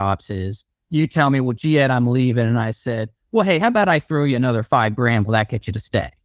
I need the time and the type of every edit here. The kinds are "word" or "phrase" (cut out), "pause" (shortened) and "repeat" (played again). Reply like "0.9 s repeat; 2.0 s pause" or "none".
none